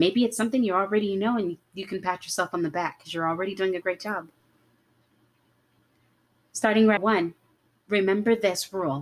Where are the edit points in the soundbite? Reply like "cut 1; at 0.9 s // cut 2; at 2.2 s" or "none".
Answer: cut 1; at 7.0 s